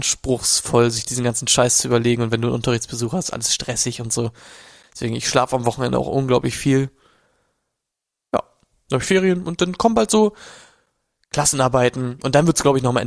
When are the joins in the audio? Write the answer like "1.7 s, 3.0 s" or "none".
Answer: none